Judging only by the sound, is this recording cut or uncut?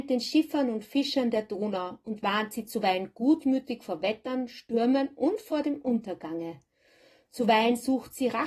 uncut